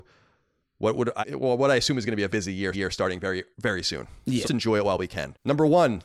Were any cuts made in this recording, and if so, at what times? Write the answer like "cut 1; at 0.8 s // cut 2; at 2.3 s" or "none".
cut 1; at 1.2 s // cut 2; at 2.3 s // cut 3; at 2.7 s // cut 4; at 3.5 s // cut 5; at 4.4 s